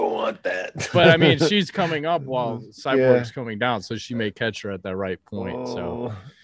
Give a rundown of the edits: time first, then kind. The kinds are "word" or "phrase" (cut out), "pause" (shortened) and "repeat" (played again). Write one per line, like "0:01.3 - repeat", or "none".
none